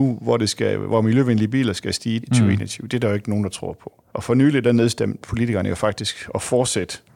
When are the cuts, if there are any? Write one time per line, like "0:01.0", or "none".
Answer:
0:02.2
0:04.1